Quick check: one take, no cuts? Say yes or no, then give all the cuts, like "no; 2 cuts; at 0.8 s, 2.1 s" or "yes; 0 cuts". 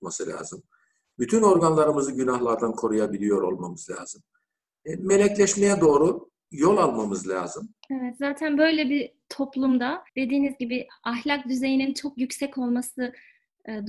no; 2 cuts; at 7.8 s, 10.1 s